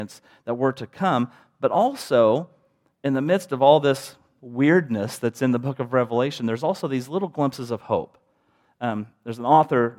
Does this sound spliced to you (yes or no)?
no